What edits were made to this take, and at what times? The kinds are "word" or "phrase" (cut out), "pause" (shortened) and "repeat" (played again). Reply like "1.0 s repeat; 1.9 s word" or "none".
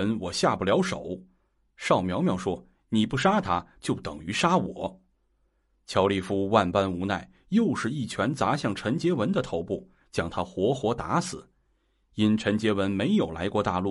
5.1 s pause